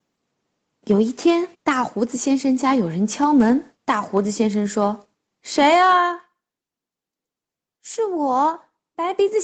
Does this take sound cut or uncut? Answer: cut